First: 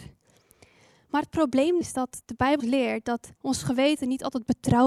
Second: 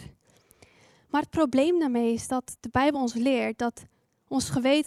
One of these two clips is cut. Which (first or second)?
first